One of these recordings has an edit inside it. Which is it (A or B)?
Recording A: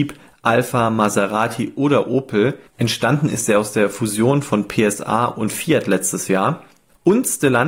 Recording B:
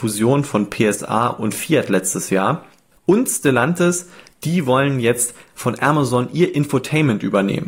A